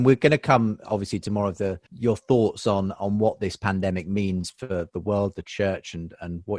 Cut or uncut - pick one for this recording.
cut